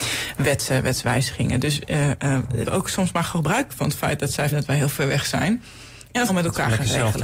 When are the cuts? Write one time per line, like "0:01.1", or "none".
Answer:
0:02.6
0:03.7
0:04.5
0:06.3